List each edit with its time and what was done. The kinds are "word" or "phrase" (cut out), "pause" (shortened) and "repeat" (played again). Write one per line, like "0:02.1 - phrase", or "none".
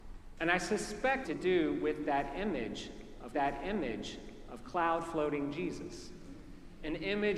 0:01.2 - phrase
0:03.3 - repeat

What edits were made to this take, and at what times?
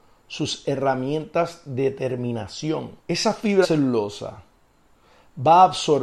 0:03.0 - pause
0:03.6 - word

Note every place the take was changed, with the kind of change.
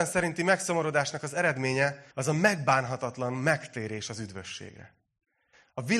0:02.1 - pause

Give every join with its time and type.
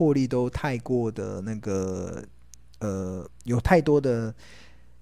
none

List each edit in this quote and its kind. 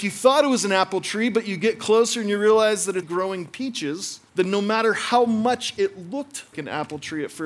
0:03.0 - word
0:04.3 - pause
0:06.5 - word

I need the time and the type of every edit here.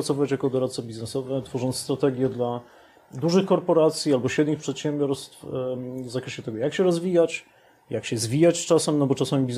none

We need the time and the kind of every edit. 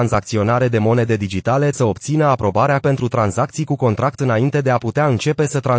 0:01.7 - word
0:02.8 - word
0:04.2 - word

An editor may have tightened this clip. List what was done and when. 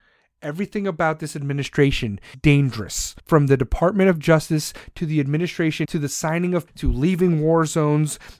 0:02.3 - word
0:03.2 - pause
0:05.8 - word
0:06.7 - phrase

